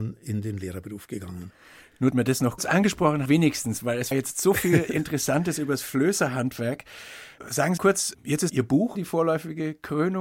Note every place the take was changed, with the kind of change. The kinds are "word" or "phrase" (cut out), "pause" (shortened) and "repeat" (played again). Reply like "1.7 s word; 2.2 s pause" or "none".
2.1 s word; 2.6 s word; 3.2 s word; 4.1 s word; 7.8 s word; 8.5 s word; 9.0 s word